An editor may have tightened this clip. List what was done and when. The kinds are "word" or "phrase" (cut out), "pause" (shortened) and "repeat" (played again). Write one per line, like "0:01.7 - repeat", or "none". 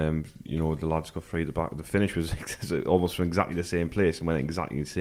none